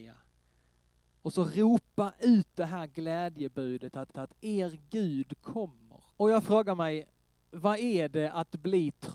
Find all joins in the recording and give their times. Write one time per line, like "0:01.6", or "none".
0:04.1
0:06.1